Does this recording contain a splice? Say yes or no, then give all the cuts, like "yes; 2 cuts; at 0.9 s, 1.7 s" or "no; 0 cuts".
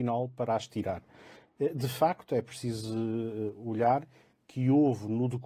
no; 0 cuts